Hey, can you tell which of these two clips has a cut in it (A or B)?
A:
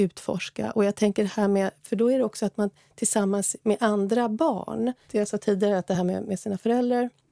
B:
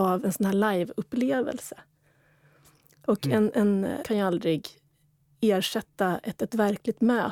B